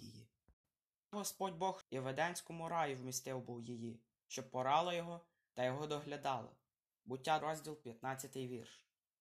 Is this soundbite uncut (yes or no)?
no